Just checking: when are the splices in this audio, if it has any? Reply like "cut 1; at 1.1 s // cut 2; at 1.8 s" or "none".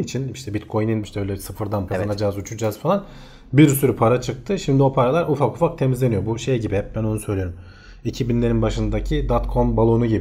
cut 1; at 1.0 s // cut 2; at 1.9 s

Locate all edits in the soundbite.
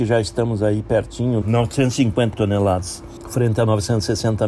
cut 1; at 1.4 s // cut 2; at 2.3 s // cut 3; at 3.2 s

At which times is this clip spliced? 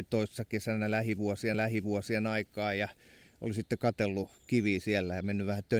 cut 1; at 1.5 s

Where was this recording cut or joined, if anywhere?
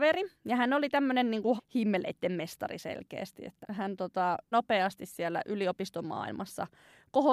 cut 1; at 1.6 s // cut 2; at 3.6 s // cut 3; at 4.5 s

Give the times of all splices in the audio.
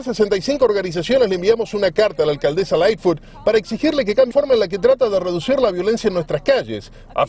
cut 1; at 4.3 s

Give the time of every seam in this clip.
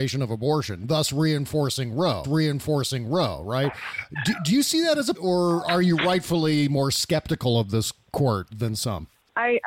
cut 1; at 2.2 s // cut 2; at 5.1 s // cut 3; at 8.5 s

